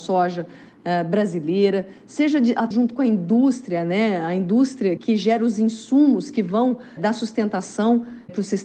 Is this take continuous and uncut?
no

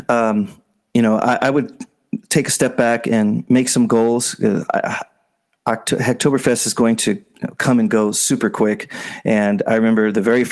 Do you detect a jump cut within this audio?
no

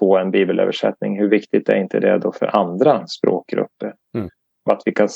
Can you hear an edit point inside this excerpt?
no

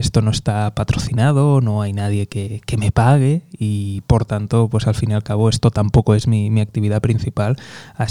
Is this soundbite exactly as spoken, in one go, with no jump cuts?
yes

